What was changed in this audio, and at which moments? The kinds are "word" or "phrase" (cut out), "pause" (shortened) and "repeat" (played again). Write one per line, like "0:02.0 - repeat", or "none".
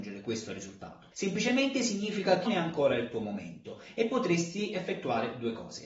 0:01.1 - pause
0:02.5 - word

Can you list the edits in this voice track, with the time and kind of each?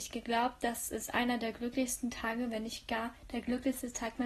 none

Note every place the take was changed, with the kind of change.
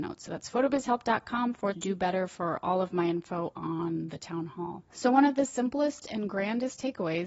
0:01.7 - word

